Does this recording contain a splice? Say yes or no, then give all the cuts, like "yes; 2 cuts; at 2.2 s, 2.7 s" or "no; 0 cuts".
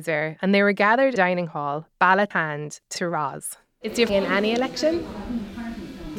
yes; 4 cuts; at 1.2 s, 2.3 s, 3.0 s, 4.1 s